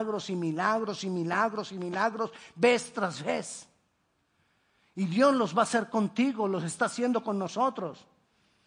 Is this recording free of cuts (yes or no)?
yes